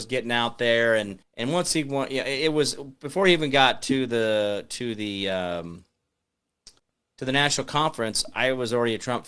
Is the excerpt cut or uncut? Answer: cut